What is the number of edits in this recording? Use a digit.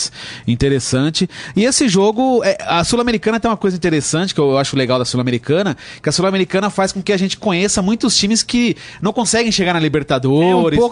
0